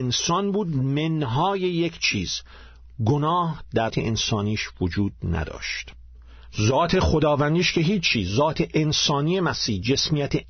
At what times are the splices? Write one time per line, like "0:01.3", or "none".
0:03.9